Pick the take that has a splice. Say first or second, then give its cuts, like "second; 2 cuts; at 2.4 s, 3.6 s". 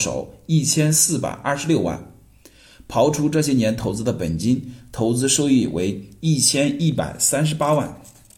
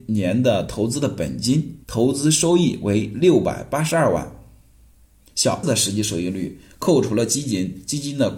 second; 2 cuts; at 1.8 s, 5.6 s